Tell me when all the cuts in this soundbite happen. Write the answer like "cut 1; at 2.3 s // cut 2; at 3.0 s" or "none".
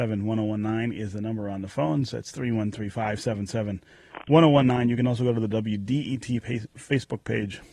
none